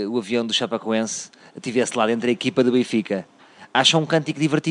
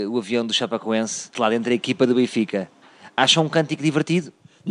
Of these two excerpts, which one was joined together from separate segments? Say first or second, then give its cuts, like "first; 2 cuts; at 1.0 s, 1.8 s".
second; 1 cut; at 1.3 s